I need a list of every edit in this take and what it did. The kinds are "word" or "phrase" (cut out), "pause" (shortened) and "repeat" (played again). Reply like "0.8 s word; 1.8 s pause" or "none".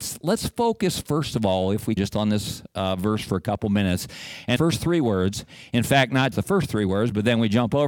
2.0 s word; 4.6 s word; 6.3 s word